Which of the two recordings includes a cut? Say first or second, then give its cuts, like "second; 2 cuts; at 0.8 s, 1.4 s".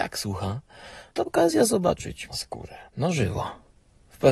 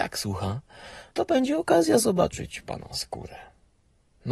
first; 3 cuts; at 1.3 s, 2.3 s, 2.9 s